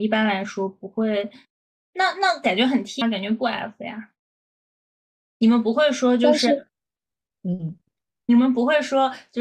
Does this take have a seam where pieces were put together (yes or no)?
yes